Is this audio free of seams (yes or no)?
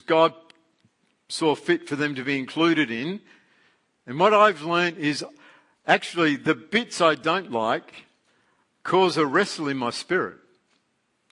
yes